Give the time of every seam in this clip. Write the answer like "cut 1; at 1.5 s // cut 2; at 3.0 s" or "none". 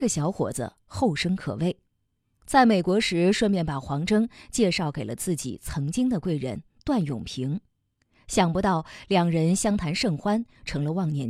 none